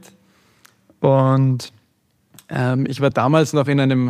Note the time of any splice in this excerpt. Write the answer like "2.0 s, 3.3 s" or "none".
none